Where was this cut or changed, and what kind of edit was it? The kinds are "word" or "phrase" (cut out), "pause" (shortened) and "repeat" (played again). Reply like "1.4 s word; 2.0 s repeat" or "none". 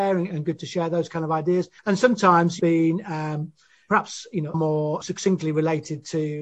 1.8 s pause; 2.6 s phrase; 4.5 s word; 5.0 s word